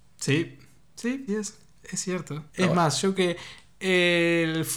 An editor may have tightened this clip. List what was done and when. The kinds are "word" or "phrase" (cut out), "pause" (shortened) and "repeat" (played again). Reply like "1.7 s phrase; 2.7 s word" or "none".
1.3 s word; 2.5 s pause; 3.2 s word